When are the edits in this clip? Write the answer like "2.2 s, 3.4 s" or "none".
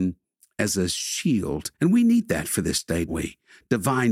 1.8 s, 3.1 s